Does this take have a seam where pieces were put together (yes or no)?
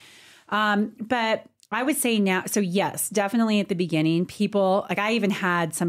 no